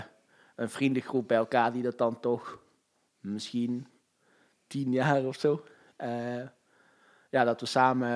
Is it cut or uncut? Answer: uncut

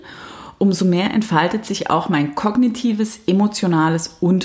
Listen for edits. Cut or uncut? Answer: uncut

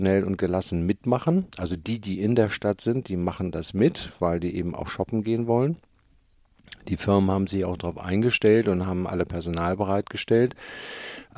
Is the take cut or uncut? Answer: uncut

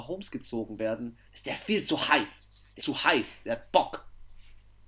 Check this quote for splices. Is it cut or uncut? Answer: cut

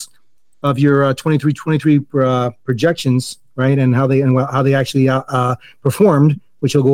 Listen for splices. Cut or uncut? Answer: uncut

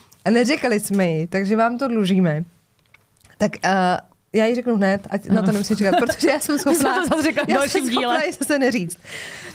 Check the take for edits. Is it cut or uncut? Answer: uncut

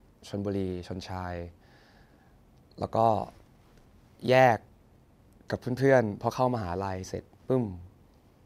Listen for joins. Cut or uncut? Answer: uncut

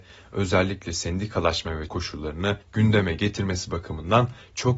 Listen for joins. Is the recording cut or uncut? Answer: cut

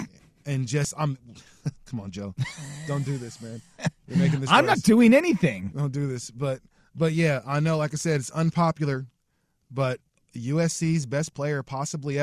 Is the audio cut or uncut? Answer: cut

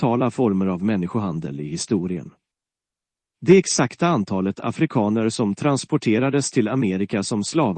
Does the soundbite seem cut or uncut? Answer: uncut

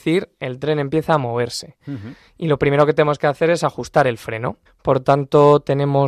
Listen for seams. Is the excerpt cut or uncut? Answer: cut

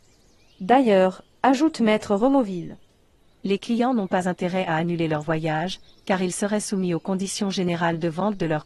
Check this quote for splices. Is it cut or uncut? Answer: uncut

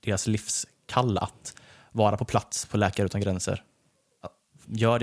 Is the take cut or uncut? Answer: uncut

